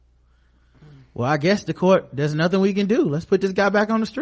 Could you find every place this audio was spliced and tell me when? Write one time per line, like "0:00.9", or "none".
none

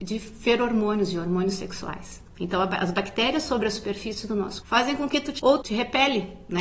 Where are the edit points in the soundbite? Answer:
0:04.6
0:05.4

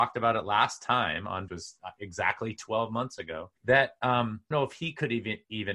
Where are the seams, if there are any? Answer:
0:01.5
0:03.6
0:04.5

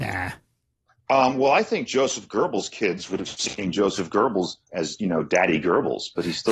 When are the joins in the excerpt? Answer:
none

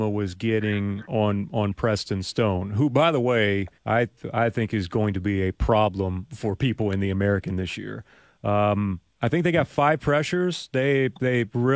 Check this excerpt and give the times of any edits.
0:03.8
0:09.1

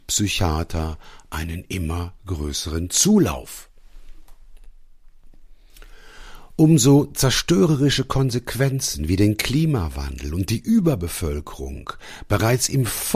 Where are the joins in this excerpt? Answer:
none

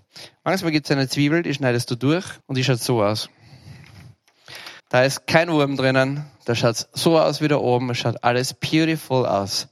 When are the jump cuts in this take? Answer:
0:02.4
0:04.8

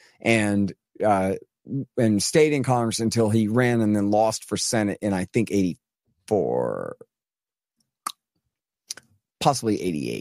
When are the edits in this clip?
none

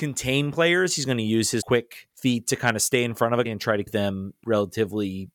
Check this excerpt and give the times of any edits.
0:01.6
0:02.1
0:03.4
0:03.8
0:04.4

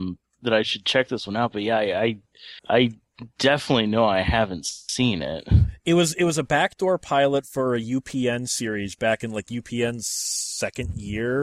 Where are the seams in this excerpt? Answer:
0:02.6

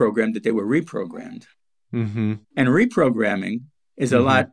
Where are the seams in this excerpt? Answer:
0:02.4

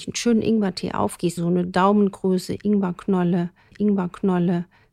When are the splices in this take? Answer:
0:01.4
0:03.7

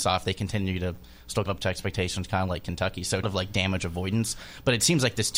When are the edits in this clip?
0:01.5
0:03.2

